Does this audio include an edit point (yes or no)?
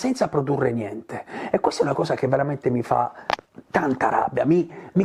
no